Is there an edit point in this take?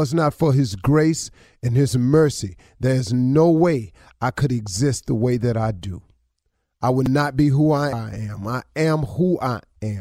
yes; 1 cut; at 7.9 s

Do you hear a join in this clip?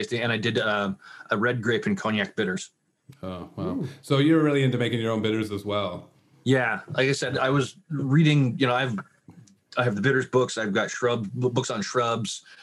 no; 0 cuts

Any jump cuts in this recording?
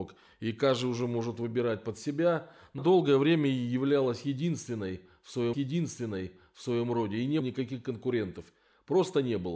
yes; 3 cuts; at 2.8 s, 5.5 s, 7.4 s

